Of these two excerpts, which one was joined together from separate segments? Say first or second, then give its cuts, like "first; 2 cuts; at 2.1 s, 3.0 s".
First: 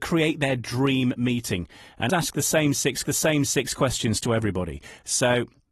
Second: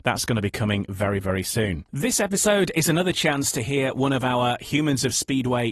first; 2 cuts; at 2.1 s, 3.0 s